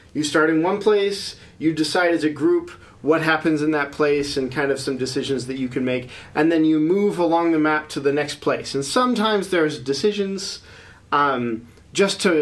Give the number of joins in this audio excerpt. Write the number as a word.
zero